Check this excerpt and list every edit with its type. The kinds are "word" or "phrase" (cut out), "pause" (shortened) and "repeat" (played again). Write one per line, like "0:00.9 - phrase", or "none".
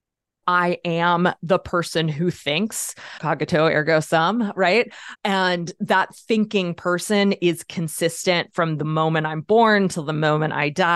none